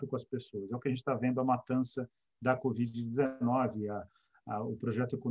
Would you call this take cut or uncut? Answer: uncut